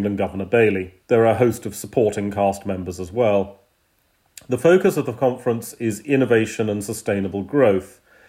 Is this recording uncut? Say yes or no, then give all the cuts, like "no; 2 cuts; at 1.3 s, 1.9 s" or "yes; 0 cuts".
no; 1 cut; at 1.0 s